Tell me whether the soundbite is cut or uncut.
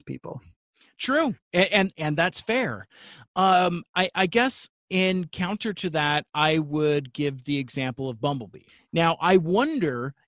uncut